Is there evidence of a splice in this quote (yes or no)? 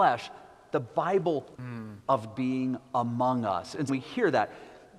yes